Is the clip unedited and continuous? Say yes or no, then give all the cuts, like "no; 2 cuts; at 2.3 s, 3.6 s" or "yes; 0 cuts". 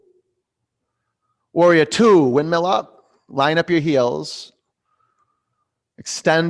yes; 0 cuts